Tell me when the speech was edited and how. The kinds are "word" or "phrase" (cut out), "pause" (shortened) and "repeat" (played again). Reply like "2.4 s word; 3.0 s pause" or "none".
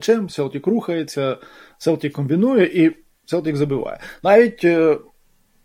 none